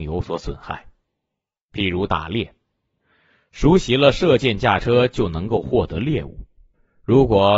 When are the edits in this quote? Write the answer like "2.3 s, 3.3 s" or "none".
none

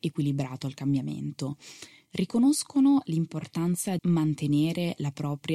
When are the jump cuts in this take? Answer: 4.0 s

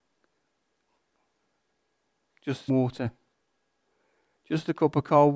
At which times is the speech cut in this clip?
2.7 s

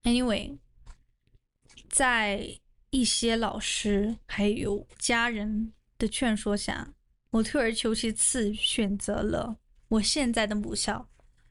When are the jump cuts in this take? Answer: 4.9 s, 7.1 s

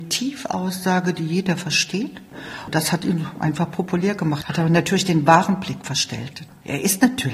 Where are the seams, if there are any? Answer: none

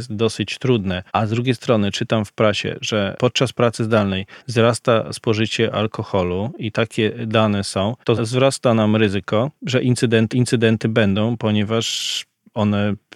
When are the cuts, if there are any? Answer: 1.1 s, 4.4 s, 8.0 s, 9.6 s, 10.3 s

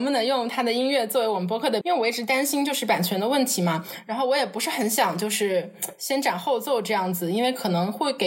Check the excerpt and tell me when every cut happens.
1.8 s

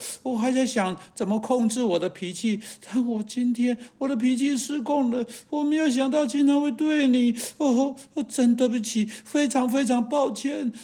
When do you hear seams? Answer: none

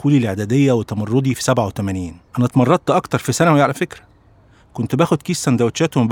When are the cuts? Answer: 2.3 s

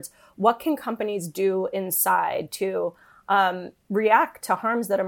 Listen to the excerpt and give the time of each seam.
none

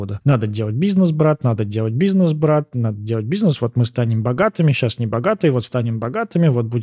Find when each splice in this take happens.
none

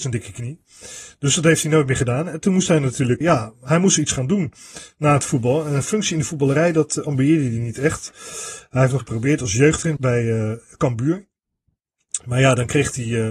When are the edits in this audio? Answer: 3.2 s, 9.0 s, 10.0 s

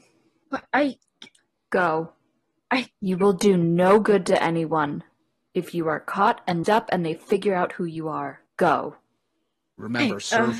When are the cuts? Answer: 6.6 s, 8.5 s

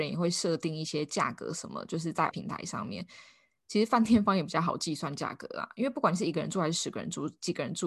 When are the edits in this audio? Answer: 2.3 s

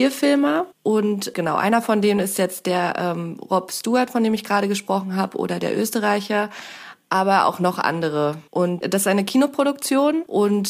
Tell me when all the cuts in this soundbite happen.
none

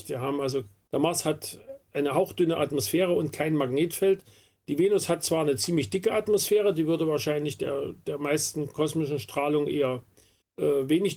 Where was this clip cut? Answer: none

